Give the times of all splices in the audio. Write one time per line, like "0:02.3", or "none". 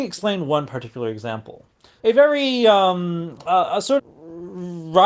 0:02.0
0:04.0